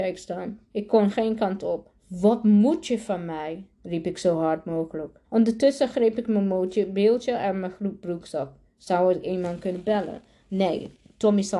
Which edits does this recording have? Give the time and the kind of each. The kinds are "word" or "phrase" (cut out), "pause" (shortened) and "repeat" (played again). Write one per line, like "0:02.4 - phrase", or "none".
0:02.0 - pause
0:03.7 - pause
0:05.2 - pause